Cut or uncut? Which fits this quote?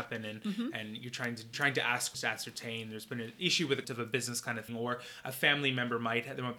cut